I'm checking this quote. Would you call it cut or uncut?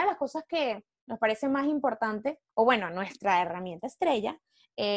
cut